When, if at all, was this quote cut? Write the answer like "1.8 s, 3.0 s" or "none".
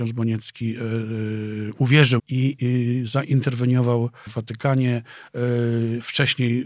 2.2 s, 2.6 s, 4.3 s